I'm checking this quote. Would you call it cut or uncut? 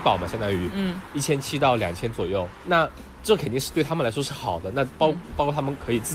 cut